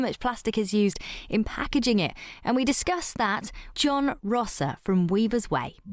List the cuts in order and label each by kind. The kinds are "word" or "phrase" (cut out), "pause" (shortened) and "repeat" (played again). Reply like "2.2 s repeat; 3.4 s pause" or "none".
3.7 s word

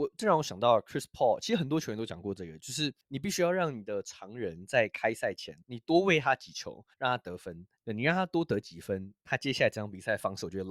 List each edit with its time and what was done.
5.6 s pause; 6.9 s pause; 7.8 s pause

